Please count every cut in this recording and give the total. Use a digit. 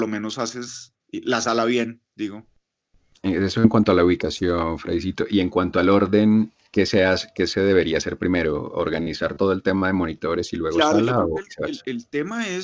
2